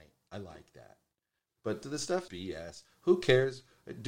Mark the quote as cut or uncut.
cut